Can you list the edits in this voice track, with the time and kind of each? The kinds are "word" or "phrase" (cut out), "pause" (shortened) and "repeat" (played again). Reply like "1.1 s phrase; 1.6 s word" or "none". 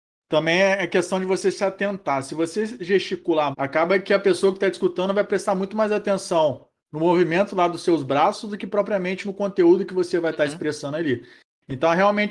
3.5 s word